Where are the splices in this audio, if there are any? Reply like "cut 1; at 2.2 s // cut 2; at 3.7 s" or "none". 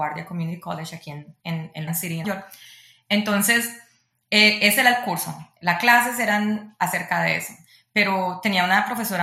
cut 1; at 1.4 s // cut 2; at 1.9 s // cut 3; at 2.2 s